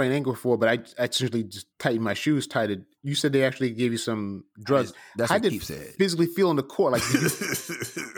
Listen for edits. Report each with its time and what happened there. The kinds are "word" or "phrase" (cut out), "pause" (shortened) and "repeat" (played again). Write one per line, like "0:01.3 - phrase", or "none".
0:01.7 - pause
0:04.5 - pause